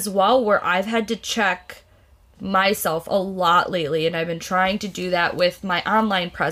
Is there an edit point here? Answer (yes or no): no